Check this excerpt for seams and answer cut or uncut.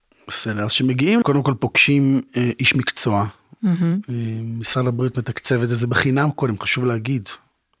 cut